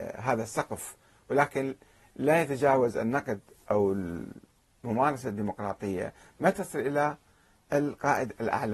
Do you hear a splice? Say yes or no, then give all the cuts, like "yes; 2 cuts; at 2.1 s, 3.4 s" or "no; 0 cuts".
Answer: no; 0 cuts